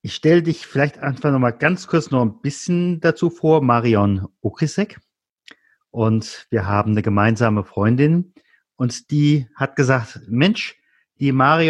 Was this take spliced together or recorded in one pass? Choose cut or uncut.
uncut